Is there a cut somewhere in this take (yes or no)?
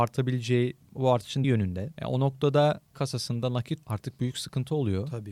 yes